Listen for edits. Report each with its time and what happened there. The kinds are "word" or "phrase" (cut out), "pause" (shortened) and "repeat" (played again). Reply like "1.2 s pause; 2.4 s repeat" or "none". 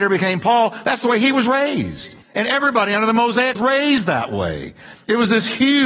2.2 s pause; 3.5 s phrase